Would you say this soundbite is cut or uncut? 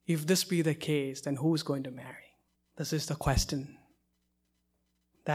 cut